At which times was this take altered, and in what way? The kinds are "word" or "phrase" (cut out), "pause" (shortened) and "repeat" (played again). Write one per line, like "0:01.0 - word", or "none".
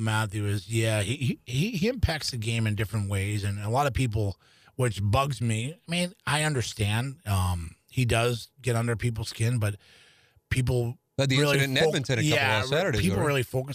none